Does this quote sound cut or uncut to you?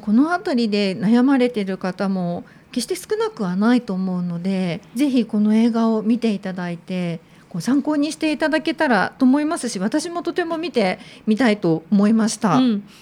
uncut